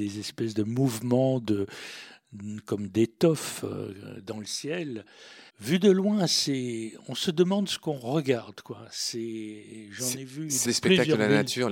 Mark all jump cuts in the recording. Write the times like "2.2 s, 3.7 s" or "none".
5.5 s, 10.6 s